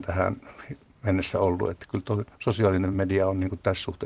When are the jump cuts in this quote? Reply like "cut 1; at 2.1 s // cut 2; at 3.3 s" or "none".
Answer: none